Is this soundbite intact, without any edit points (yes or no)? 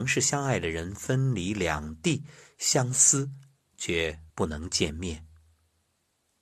no